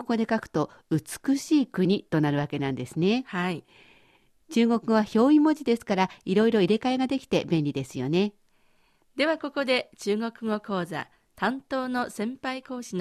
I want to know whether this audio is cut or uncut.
uncut